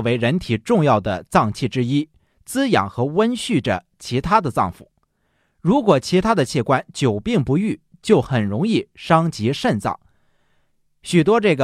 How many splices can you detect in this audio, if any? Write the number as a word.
zero